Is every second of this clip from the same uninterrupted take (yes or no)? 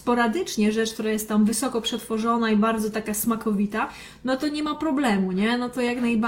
yes